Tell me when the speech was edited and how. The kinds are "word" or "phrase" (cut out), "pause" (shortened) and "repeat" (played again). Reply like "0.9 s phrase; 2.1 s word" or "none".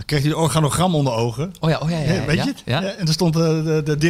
none